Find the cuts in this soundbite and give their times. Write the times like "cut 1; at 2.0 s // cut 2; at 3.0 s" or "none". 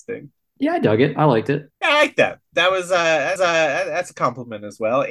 cut 1; at 1.7 s // cut 2; at 3.4 s